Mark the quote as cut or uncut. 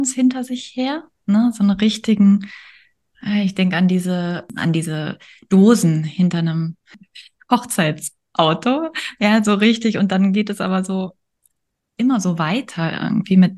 uncut